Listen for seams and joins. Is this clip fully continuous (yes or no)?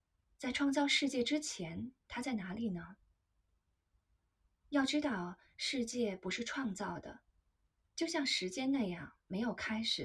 yes